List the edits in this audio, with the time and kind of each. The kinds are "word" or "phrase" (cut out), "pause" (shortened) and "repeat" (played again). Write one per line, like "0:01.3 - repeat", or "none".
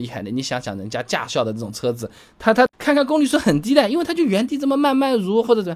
0:02.7 - pause